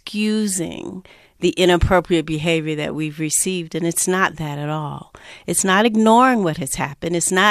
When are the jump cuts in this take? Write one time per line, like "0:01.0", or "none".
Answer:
none

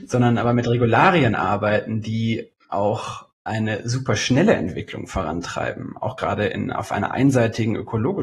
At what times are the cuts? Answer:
none

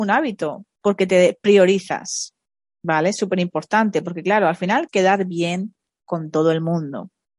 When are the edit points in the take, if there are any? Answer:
0:04.9

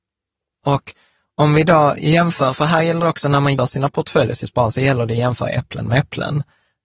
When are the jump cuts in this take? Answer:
0:03.6

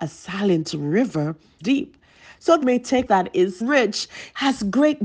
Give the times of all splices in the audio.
0:01.6
0:02.6
0:03.1
0:03.6

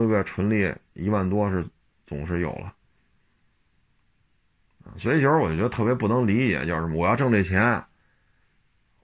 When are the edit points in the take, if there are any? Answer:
none

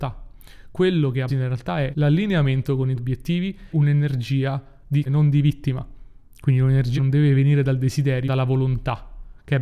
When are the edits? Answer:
0:01.3
0:01.9
0:03.0
0:03.7
0:05.1
0:07.0
0:08.3

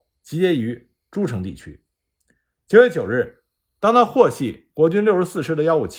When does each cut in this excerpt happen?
none

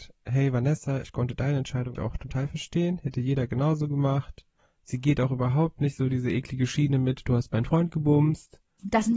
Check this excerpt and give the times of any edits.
0:01.9
0:04.6

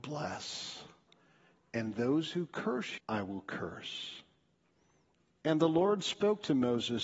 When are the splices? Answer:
0:03.0

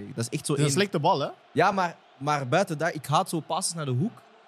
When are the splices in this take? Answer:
none

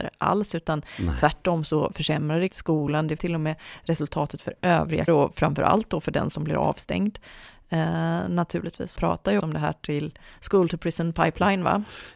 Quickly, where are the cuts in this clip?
0:02.5
0:03.2
0:05.1
0:09.0
0:09.4

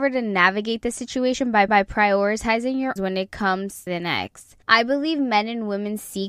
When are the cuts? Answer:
0:01.7
0:03.0
0:03.9
0:04.6

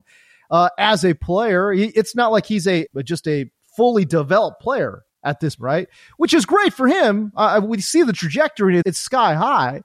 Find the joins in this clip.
0:02.9
0:05.5
0:08.8

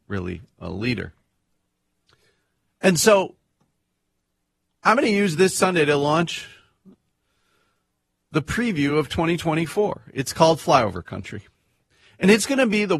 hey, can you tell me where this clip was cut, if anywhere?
none

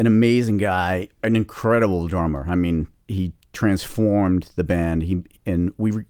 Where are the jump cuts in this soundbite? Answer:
0:01.1
0:03.0

